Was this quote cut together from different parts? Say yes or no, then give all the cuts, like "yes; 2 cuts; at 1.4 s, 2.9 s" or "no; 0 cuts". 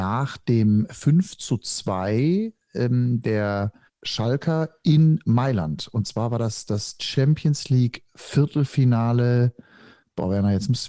yes; 1 cut; at 3.9 s